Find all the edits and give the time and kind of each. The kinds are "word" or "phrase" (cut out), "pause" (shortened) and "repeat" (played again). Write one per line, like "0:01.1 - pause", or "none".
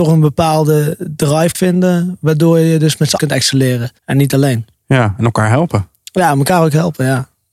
0:01.5 - word
0:03.2 - word
0:04.0 - pause